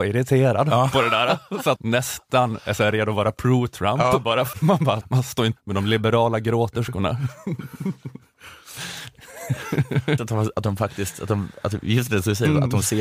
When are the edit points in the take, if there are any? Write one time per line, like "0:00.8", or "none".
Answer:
0:01.8
0:04.5
0:05.0
0:05.6
0:10.2